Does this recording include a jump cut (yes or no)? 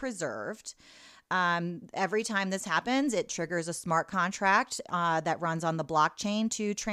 no